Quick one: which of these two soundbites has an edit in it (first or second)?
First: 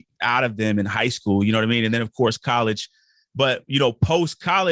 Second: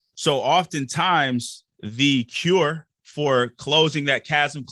second